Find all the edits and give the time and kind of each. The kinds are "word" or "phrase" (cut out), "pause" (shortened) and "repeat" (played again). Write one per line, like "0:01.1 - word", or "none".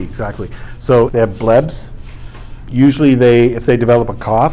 0:01.1 - word
0:02.7 - word